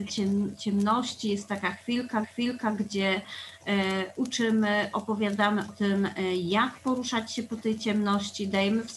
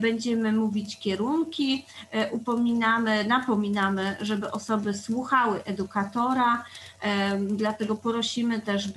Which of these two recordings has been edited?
first; 2 cuts; at 2.2 s, 5.7 s

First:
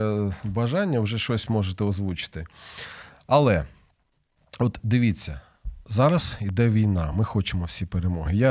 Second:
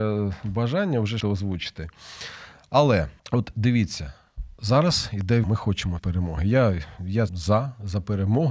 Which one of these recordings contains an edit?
second; 5 cuts; at 1.2 s, 3.2 s, 5.4 s, 6.0 s, 7.3 s

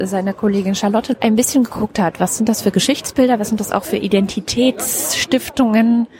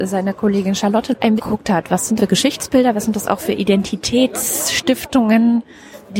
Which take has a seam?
second; 2 cuts; at 1.4 s, 2.2 s

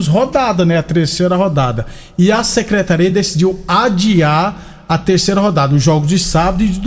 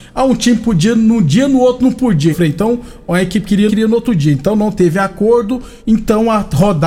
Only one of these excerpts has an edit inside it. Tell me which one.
second; 3 cuts; at 2.3 s, 3.7 s, 5.8 s

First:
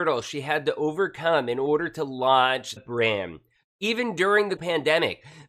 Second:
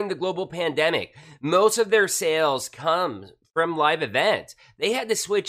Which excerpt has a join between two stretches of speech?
first; 2 cuts; at 2.8 s, 4.6 s

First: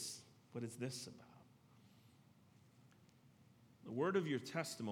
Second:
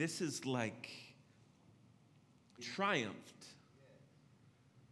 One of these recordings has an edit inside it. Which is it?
second; 1 cut; at 2.6 s

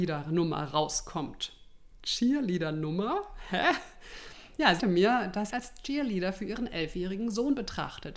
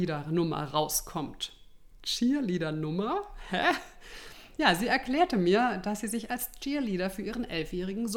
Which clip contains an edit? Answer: first; 2 cuts; at 4.8 s, 5.5 s

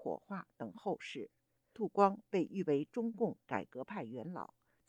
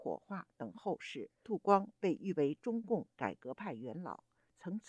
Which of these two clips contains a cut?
second; 1 cut; at 1.3 s

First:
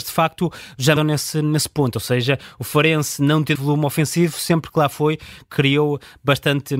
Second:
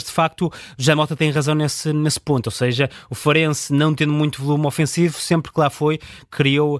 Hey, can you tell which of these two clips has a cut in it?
first; 2 cuts; at 1.0 s, 3.6 s

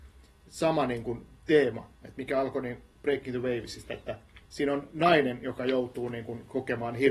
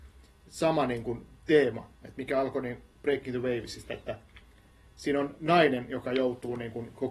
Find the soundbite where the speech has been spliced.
first; 1 cut; at 4.4 s

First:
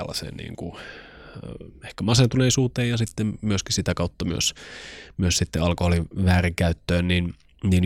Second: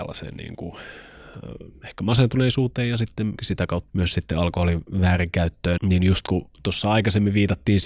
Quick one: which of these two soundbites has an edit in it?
second; 3 cuts; at 3.4 s, 3.9 s, 5.8 s

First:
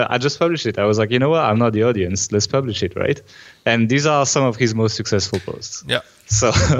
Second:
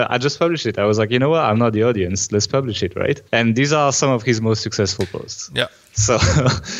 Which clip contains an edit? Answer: second; 1 cut; at 3.3 s

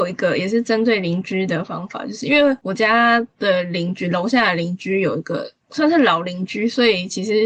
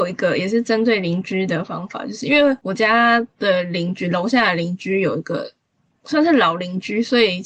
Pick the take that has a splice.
first; 1 cut; at 5.6 s

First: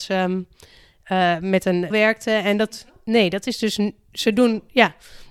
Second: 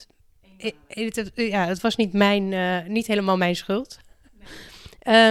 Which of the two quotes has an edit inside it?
first; 1 cut; at 1.9 s

